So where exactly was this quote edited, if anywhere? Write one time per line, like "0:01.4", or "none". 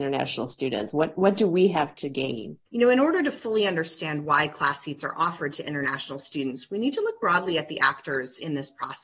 0:02.7

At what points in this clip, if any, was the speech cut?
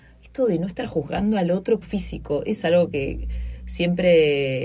0:01.8
0:02.6

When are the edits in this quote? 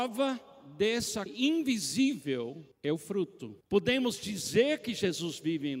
0:01.3
0:02.7
0:03.6

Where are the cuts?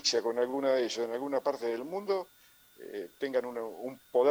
none

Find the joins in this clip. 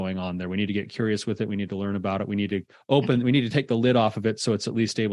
none

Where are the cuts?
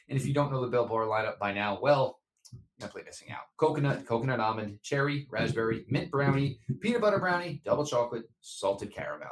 0:02.8
0:03.5

